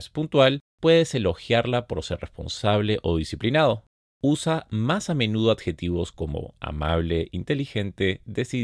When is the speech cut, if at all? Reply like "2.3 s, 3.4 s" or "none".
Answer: none